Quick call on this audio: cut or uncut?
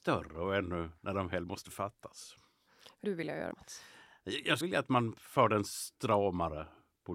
cut